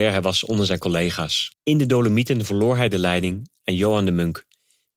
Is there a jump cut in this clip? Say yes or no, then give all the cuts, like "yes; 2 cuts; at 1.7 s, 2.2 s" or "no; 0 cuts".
yes; 1 cut; at 1.6 s